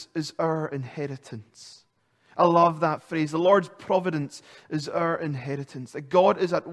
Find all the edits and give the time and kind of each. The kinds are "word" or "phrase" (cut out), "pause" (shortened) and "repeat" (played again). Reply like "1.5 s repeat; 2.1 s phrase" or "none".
none